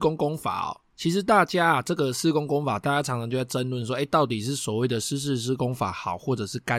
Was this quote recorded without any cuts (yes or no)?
yes